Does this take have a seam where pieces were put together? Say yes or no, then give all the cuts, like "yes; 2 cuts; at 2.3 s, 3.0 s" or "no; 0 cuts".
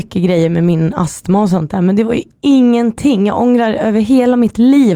no; 0 cuts